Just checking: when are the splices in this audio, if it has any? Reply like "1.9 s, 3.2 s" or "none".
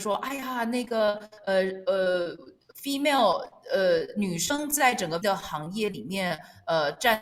5.2 s